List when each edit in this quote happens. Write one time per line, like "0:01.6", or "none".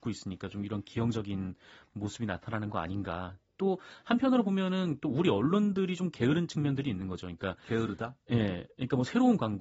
none